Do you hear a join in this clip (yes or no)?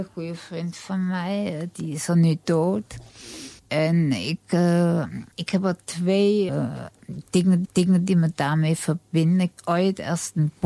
yes